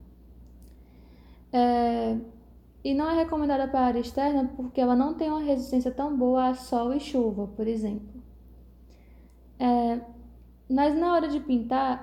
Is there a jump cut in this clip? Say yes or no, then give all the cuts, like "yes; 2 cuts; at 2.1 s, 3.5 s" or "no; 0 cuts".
no; 0 cuts